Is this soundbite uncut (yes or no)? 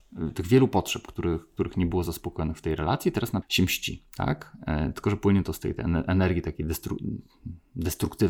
no